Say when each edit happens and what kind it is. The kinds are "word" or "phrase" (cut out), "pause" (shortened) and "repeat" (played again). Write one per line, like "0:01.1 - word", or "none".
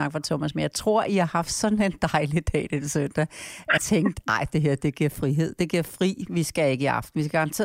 0:03.8 - word